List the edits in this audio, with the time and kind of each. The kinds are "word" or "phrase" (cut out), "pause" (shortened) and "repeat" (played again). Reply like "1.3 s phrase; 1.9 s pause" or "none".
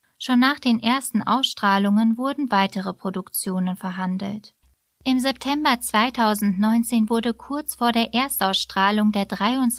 none

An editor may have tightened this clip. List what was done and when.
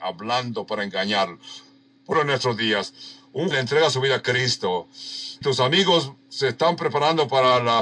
2.1 s word; 3.5 s word; 5.4 s word

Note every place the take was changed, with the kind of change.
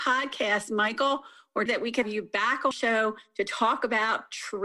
1.7 s word; 2.0 s word; 2.7 s word

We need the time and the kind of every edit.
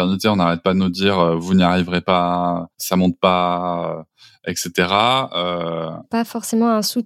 2.7 s pause

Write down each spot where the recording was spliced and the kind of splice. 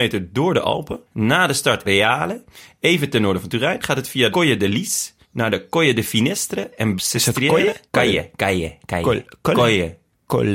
1.1 s pause; 1.8 s phrase; 4.3 s word; 5.2 s pause; 7.0 s word; 7.9 s pause

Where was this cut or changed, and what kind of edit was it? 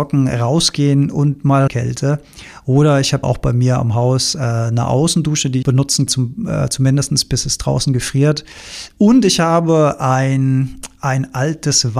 1.7 s phrase; 3.2 s word; 5.6 s phrase; 6.1 s word

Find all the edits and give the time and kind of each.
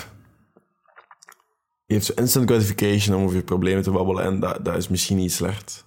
none

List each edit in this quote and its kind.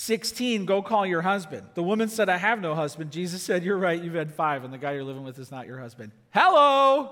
none

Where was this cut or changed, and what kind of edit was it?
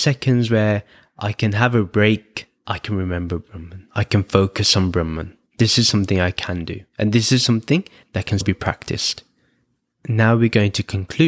none

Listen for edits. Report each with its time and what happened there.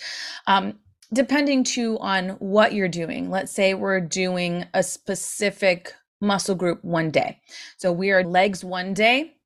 8.2 s word

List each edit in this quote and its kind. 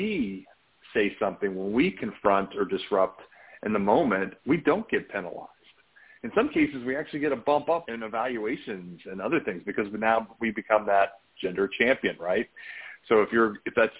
7.9 s word

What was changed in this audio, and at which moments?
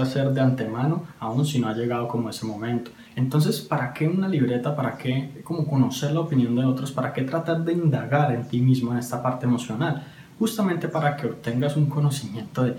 3.1 s pause

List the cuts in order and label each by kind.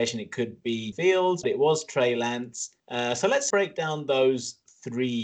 0.9 s word; 1.4 s word; 2.8 s pause; 3.5 s word

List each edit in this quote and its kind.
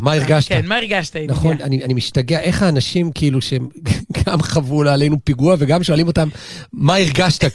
none

